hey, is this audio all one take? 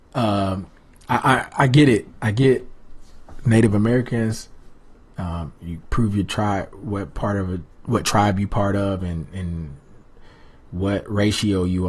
yes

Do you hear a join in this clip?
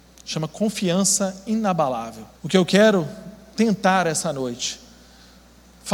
yes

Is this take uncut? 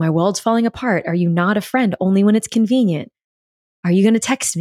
yes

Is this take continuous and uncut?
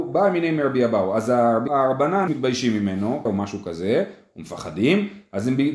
no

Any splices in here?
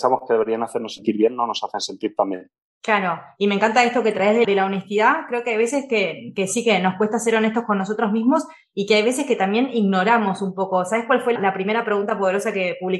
yes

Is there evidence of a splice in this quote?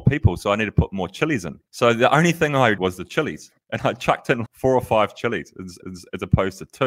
yes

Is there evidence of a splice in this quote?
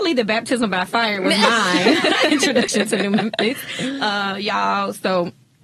no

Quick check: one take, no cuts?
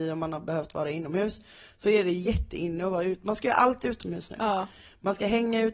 yes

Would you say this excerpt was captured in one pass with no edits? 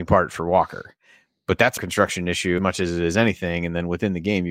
no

